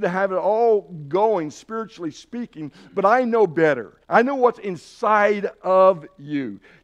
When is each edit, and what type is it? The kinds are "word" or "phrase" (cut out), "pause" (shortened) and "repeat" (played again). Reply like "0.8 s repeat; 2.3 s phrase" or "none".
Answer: 4.0 s pause